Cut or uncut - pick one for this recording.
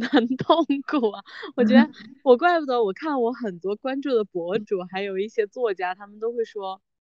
uncut